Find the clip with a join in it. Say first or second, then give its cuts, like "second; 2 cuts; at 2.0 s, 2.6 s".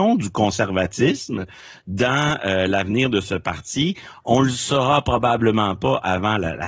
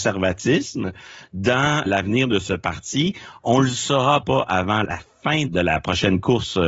second; 4 cuts; at 1.9 s, 4.2 s, 4.8 s, 5.5 s